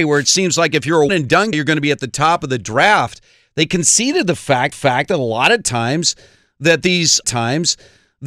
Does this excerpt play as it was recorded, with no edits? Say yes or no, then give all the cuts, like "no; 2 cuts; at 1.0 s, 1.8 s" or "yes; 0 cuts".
no; 4 cuts; at 1.1 s, 1.5 s, 4.7 s, 7.2 s